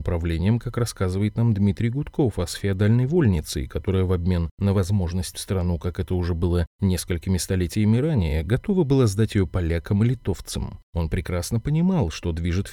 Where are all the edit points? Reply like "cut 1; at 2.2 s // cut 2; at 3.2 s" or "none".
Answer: cut 1; at 5.3 s